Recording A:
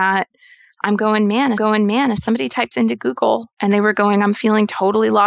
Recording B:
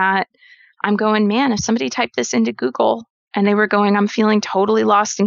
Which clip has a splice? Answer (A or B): A